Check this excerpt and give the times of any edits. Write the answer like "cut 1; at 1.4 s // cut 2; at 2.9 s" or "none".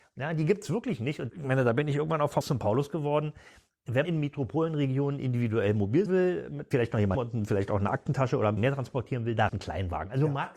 cut 1; at 1.3 s // cut 2; at 2.4 s // cut 3; at 4.0 s // cut 4; at 6.1 s // cut 5; at 6.7 s // cut 6; at 7.1 s // cut 7; at 8.6 s // cut 8; at 9.5 s